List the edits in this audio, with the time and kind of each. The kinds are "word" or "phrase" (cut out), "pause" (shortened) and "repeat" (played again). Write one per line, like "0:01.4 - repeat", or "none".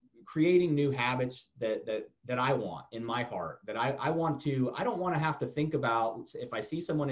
none